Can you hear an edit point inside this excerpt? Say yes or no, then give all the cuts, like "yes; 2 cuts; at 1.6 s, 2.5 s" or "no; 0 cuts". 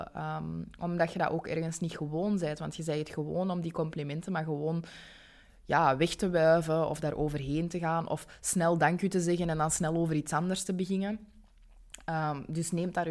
no; 0 cuts